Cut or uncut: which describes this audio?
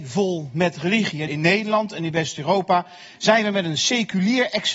cut